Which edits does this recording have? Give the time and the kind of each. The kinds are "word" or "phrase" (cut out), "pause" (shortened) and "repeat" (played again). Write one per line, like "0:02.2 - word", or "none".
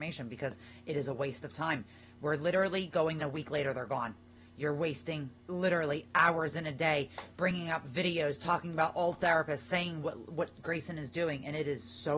0:03.2 - phrase
0:05.4 - pause